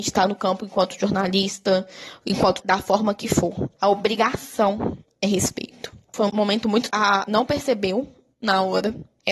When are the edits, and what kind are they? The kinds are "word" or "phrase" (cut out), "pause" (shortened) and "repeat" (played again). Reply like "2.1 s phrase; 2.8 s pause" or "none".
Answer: 2.6 s word; 6.3 s word; 6.9 s word; 7.3 s word

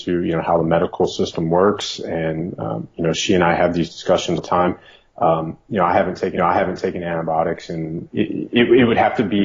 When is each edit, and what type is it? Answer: 4.4 s word; 6.4 s repeat; 8.1 s word

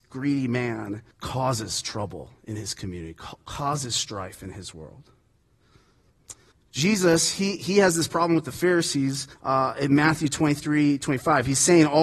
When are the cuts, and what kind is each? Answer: 1.1 s pause; 2.4 s pause; 6.5 s pause; 9.3 s pause

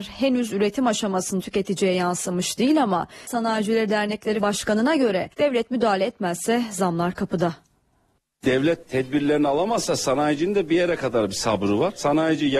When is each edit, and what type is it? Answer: 1.4 s phrase; 3.3 s word; 4.4 s word; 5.3 s pause; 8.8 s word

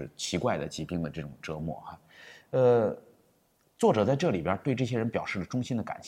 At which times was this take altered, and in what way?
none

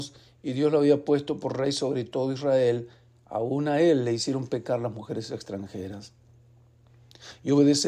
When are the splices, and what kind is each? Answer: none

